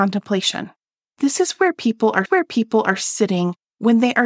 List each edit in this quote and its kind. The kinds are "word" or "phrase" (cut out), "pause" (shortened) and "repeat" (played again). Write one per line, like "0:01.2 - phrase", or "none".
0:02.3 - repeat